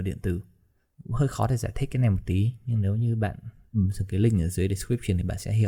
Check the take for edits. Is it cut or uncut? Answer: uncut